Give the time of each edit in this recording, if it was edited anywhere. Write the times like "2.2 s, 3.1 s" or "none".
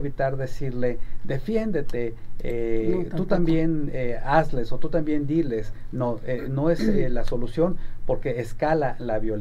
none